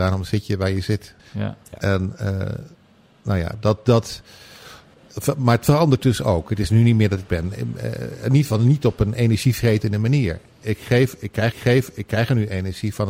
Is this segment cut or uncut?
cut